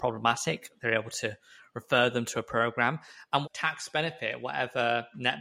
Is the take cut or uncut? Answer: cut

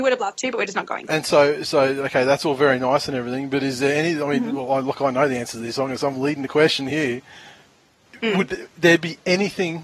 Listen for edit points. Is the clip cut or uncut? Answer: uncut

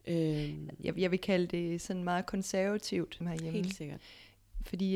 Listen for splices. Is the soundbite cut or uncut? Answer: cut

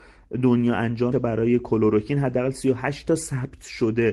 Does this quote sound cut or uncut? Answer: cut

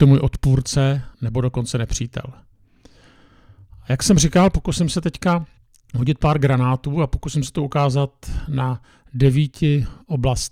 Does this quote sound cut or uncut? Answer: cut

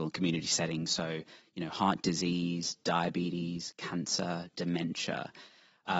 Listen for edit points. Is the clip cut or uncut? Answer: uncut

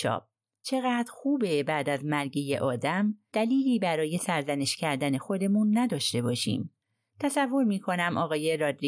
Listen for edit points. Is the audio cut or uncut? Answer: uncut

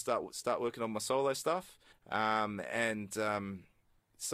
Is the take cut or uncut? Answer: cut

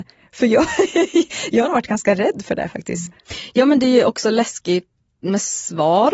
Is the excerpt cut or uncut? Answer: uncut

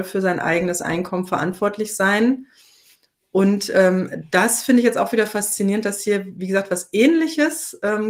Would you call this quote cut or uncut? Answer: uncut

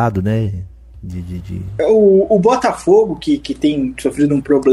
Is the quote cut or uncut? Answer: cut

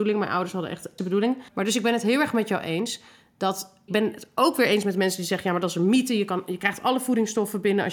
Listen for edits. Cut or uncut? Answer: cut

